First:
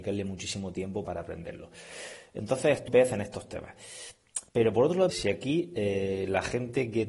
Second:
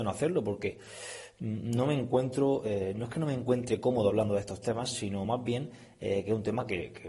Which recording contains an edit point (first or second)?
first